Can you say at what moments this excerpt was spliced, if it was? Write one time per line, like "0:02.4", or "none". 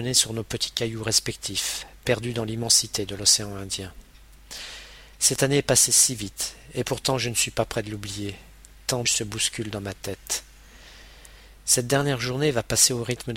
0:09.0